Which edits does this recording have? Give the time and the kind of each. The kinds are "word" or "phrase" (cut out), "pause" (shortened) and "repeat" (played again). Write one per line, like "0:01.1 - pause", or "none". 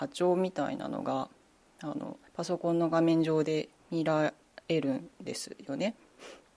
0:02.3 - pause
0:03.8 - pause